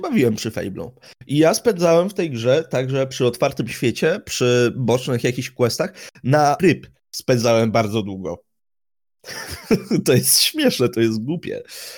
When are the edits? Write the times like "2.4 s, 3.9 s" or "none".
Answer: 6.6 s